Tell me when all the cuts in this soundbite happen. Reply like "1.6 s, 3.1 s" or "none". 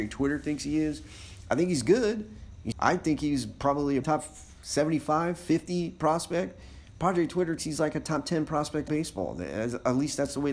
2.7 s, 4.0 s, 7.6 s, 8.9 s